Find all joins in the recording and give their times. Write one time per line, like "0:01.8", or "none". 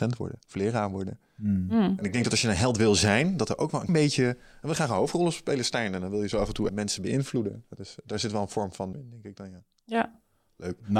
0:03.9
0:06.7
0:08.9